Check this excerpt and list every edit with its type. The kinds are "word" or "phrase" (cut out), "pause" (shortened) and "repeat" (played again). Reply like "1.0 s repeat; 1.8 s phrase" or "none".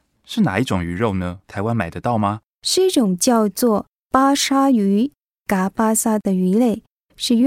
1.4 s pause; 2.5 s pause